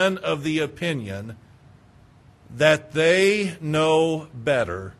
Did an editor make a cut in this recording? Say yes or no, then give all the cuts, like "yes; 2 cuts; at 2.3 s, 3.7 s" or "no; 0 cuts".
no; 0 cuts